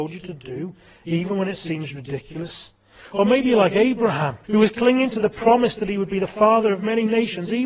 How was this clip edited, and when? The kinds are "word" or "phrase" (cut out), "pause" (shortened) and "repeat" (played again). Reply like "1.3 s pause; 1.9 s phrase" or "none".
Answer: 4.4 s pause